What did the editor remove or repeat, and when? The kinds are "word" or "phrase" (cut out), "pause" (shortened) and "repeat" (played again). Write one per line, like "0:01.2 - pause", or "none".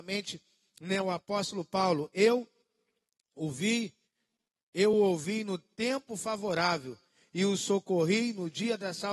none